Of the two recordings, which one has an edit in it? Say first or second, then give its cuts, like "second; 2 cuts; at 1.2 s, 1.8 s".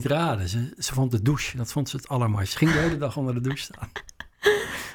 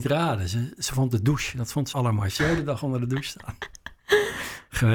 second; 2 cuts; at 1.9 s, 2.4 s